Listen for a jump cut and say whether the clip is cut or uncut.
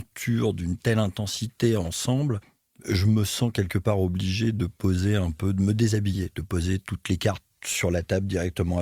uncut